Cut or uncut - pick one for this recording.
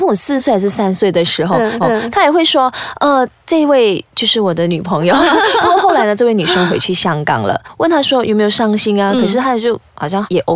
cut